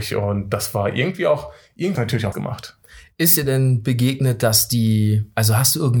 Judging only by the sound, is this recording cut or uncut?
cut